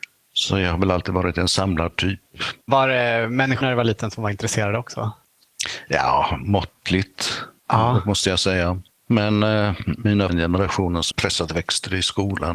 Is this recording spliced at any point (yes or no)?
yes